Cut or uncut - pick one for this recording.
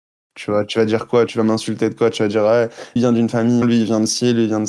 cut